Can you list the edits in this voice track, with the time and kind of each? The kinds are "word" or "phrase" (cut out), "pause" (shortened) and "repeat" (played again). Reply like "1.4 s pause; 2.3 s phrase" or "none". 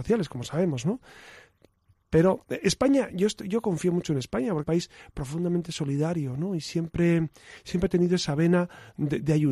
4.6 s phrase